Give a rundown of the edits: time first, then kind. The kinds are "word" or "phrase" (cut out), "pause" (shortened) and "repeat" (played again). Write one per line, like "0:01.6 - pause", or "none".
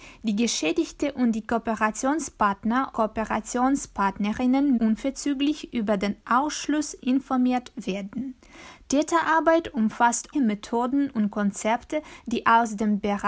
0:02.9 - word
0:04.8 - word
0:10.3 - word